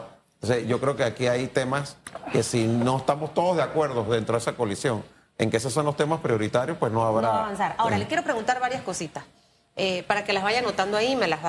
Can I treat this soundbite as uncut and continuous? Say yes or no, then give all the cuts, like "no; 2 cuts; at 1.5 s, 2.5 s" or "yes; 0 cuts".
yes; 0 cuts